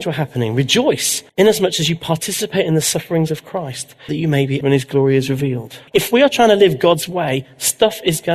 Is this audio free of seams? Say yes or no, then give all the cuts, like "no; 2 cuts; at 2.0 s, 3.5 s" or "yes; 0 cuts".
no; 4 cuts; at 1.3 s, 4.1 s, 4.6 s, 5.9 s